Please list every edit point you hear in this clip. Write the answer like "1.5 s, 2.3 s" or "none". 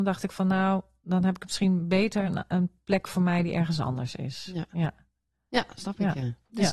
none